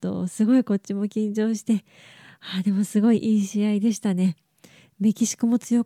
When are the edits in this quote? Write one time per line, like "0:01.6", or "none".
none